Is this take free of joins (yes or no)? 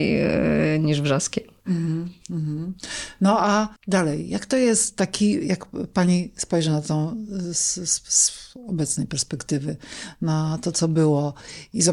no